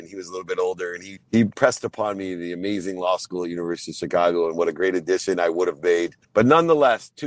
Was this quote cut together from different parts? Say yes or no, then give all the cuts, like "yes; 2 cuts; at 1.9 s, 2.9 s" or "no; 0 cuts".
yes; 3 cuts; at 1.2 s, 1.5 s, 6.2 s